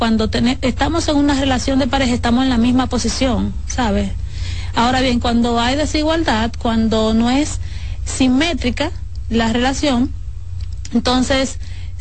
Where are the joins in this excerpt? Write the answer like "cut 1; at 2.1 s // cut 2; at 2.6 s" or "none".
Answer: none